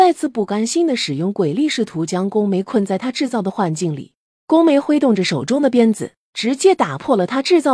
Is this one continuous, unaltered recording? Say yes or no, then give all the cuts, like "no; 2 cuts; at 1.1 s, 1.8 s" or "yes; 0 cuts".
yes; 0 cuts